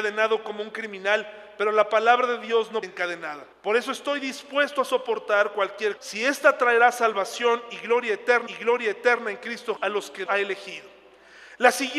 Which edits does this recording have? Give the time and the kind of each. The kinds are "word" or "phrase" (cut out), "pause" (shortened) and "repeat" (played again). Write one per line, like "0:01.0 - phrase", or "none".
0:02.8 - phrase
0:03.5 - pause
0:06.0 - word
0:08.5 - repeat
0:09.8 - word
0:10.3 - word